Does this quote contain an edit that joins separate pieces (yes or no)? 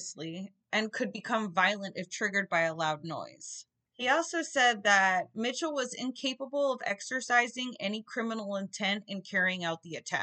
no